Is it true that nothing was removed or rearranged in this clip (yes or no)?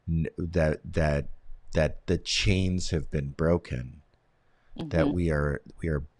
yes